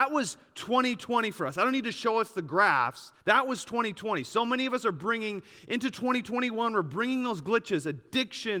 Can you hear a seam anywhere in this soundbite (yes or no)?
yes